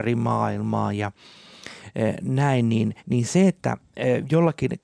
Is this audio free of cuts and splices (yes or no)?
no